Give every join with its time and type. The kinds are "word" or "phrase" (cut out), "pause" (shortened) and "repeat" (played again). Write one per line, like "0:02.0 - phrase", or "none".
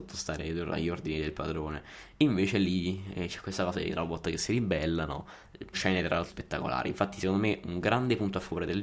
0:05.7 - word
0:06.3 - word